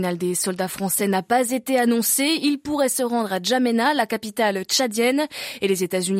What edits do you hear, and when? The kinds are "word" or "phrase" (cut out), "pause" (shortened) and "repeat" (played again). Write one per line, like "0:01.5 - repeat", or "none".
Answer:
none